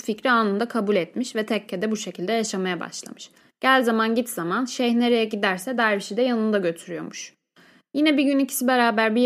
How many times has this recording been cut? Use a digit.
0